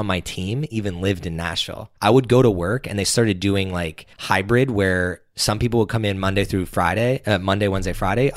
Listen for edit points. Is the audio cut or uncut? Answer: cut